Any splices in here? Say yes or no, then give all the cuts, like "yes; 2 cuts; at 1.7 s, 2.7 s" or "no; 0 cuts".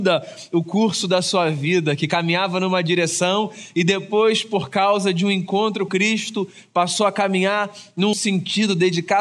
yes; 2 cuts; at 5.9 s, 8.1 s